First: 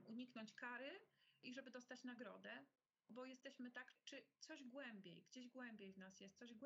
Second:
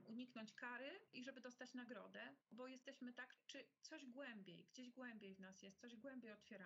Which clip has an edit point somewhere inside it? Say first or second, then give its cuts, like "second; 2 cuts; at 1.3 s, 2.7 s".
second; 2 cuts; at 1.1 s, 2.4 s